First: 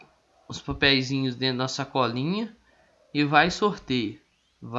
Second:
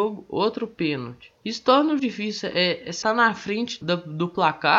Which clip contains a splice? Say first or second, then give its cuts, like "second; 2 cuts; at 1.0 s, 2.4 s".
second; 4 cuts; at 1.4 s, 2.0 s, 3.0 s, 3.8 s